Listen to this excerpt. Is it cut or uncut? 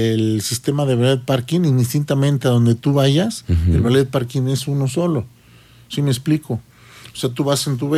uncut